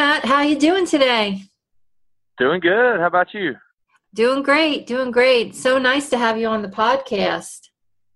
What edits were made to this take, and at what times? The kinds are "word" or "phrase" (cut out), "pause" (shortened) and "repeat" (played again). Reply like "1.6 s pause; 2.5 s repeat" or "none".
none

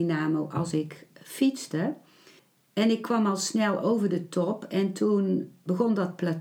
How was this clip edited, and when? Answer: 2.4 s pause

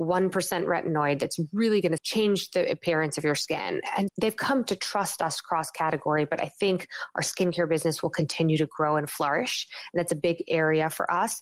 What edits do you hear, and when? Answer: 2.0 s phrase; 4.1 s word

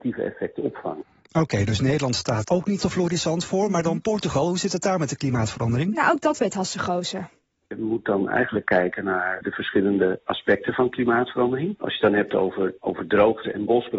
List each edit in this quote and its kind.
2.5 s word; 2.8 s word

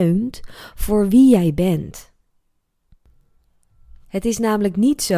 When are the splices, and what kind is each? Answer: 4.0 s pause

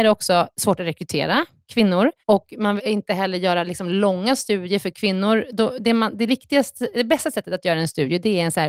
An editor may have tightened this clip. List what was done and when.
2.2 s pause; 2.8 s word; 6.3 s word; 6.9 s word

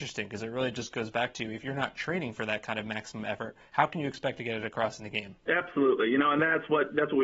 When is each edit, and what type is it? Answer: 5.4 s pause

